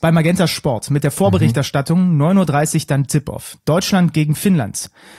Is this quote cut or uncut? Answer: uncut